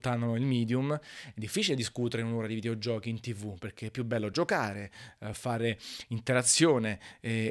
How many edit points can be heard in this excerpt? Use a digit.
0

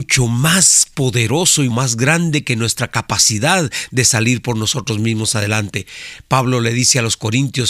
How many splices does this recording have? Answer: 1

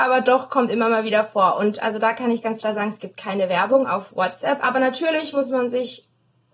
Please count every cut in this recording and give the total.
0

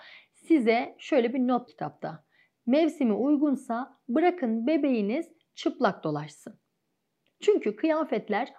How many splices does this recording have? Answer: 1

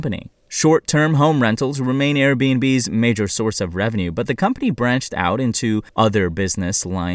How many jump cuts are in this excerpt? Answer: 1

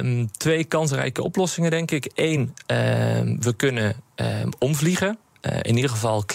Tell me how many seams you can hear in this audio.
0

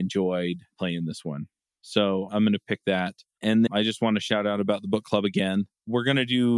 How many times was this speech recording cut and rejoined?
2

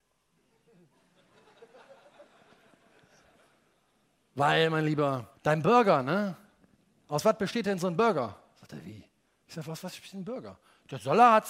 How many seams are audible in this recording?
2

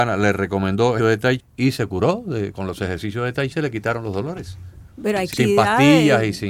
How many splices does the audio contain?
5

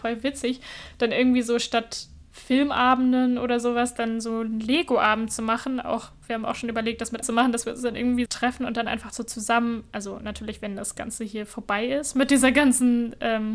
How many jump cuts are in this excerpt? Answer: 2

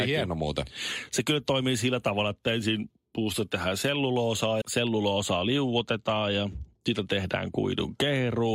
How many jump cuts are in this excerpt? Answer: 1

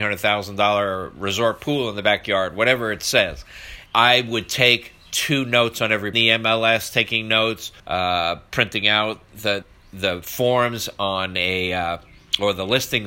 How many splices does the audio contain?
4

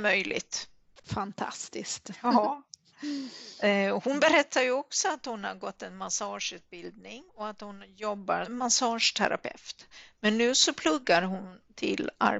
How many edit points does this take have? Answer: 2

